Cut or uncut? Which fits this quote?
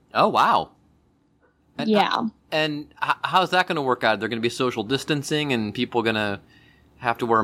uncut